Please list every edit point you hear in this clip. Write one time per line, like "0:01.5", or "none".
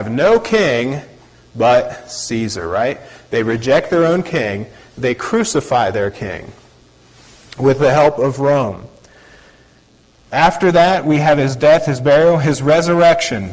none

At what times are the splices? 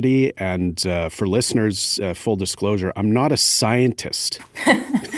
none

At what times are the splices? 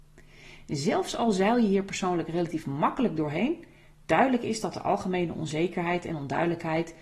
none

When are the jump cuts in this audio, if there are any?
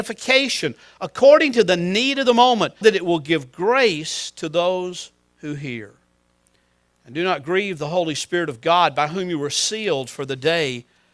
0:02.8

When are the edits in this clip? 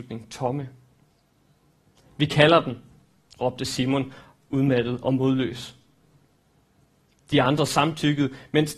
none

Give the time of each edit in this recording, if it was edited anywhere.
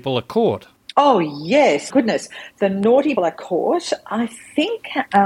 0:01.9
0:03.2

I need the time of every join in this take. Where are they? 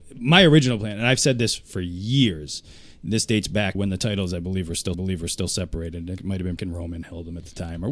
0:03.7
0:04.9
0:06.2
0:06.6

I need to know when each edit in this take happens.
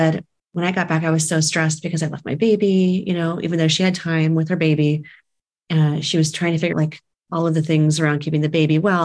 0:06.7

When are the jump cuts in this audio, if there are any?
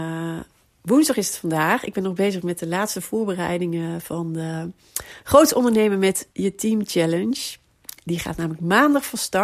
0:06.3

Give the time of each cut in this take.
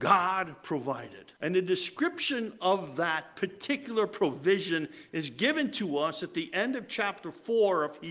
0:01.4

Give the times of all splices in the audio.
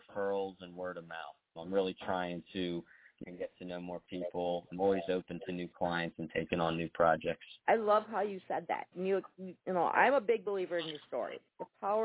0:01.6
0:03.2
0:04.7
0:07.6
0:09.6

